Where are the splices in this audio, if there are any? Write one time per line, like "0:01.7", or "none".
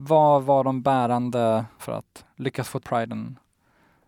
0:01.8
0:02.3
0:02.8